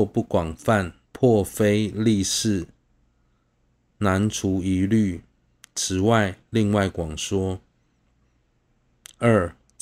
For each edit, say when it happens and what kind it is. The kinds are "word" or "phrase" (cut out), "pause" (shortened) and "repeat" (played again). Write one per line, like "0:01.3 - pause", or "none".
0:01.0 - pause